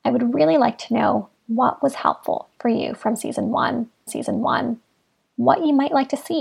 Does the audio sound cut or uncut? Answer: cut